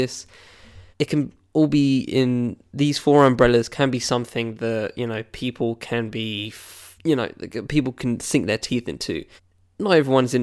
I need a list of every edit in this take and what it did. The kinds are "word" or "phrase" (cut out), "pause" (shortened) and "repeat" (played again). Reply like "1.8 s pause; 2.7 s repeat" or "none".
0.9 s pause; 7.0 s pause; 9.4 s pause